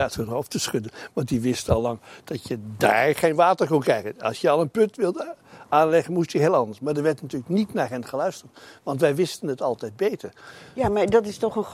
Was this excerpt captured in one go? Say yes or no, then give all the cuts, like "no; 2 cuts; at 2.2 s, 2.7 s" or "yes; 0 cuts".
yes; 0 cuts